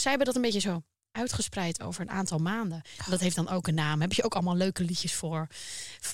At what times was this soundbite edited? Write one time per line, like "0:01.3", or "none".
none